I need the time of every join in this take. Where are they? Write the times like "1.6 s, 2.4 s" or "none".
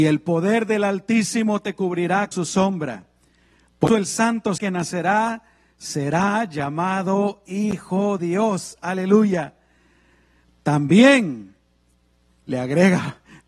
2.3 s, 3.9 s, 4.6 s, 8.2 s